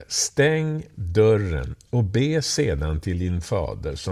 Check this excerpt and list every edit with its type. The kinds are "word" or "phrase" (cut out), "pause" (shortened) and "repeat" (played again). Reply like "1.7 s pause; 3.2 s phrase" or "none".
none